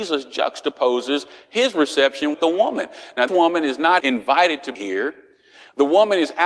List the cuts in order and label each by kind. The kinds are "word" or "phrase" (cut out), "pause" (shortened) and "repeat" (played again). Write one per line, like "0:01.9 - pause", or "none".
0:02.3 - word
0:03.3 - word
0:04.0 - word
0:04.7 - word